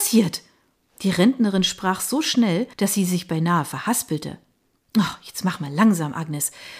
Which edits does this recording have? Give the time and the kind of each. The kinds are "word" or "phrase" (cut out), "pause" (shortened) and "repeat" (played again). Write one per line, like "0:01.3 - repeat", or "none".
0:02.7 - pause